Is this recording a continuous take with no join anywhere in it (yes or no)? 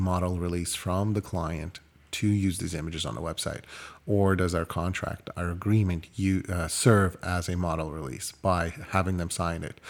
yes